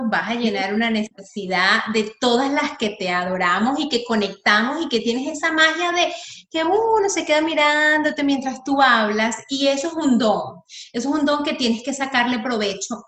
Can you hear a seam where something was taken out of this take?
no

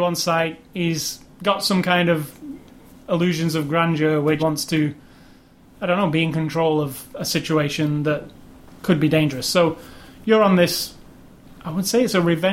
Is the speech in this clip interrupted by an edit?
yes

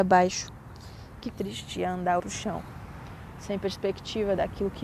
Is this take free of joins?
no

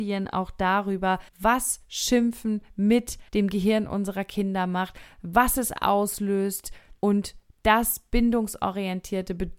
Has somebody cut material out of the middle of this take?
yes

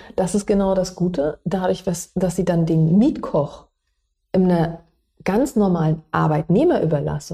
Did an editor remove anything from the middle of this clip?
no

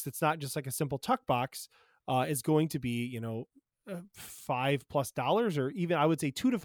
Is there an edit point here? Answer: no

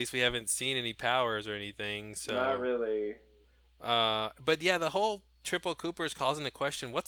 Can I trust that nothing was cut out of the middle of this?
yes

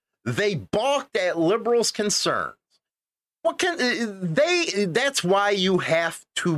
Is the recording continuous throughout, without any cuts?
yes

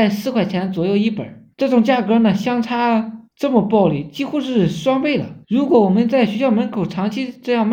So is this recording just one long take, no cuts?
no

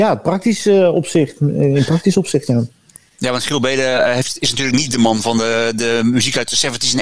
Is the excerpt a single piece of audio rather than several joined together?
yes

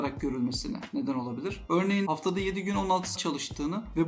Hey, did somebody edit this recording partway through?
yes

